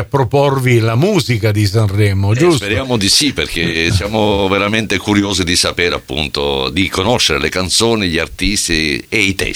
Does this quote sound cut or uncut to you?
uncut